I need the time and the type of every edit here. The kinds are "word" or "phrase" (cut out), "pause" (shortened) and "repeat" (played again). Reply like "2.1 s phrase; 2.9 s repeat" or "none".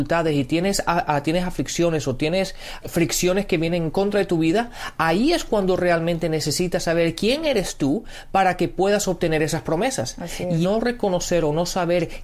2.8 s word; 10.6 s word